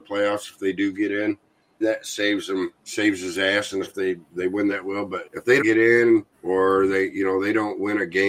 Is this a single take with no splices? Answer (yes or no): no